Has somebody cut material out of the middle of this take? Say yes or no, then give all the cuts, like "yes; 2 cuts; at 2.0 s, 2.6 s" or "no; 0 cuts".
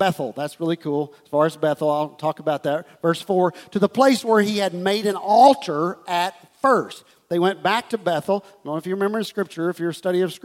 no; 0 cuts